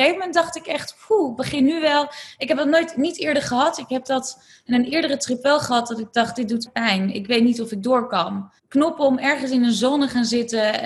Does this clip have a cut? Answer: yes; 2 cuts; at 6.7 s, 8.6 s

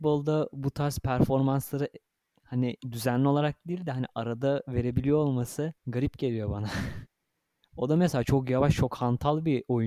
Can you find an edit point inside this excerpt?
yes; 3 cuts; at 2.8 s, 5.8 s, 7.1 s

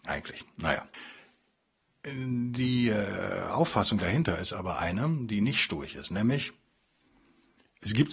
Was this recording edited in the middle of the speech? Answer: no; 0 cuts

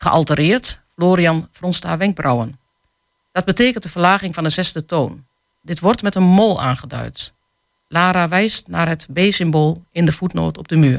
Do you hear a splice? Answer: no; 0 cuts

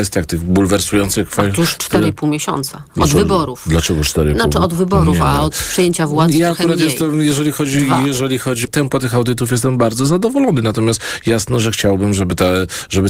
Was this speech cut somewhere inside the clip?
yes; 2 cuts; at 2.9 s, 8.6 s

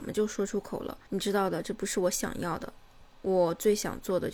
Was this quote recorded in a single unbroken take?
no; 1 cut; at 1.1 s

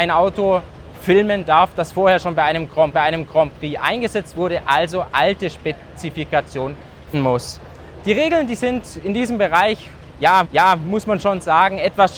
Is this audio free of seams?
no; 4 cuts; at 2.9 s, 5.1 s, 7.1 s, 10.4 s

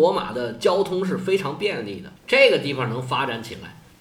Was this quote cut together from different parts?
yes; 1 cut; at 2.2 s

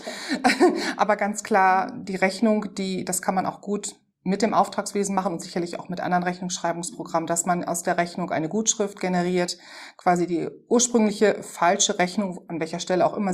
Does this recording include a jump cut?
yes; 1 cut; at 4.1 s

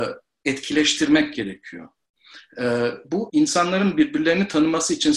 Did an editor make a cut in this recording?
yes; 1 cut; at 3.3 s

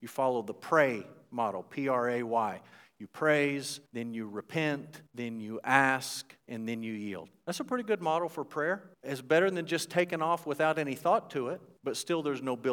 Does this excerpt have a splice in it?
yes; 5 cuts; at 3.9 s, 5.1 s, 6.4 s, 8.9 s, 11.8 s

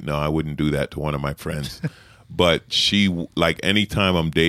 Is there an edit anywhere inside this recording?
no; 0 cuts

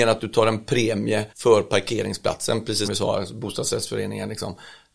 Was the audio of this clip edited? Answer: yes; 2 cuts; at 1.3 s, 2.8 s

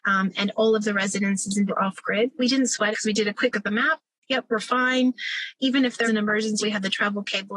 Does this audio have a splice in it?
yes; 6 cuts; at 1.7 s, 2.4 s, 2.9 s, 3.5 s, 6.0 s, 6.6 s

